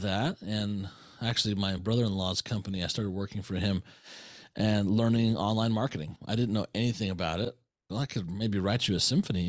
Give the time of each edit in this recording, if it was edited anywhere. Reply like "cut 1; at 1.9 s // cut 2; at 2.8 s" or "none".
none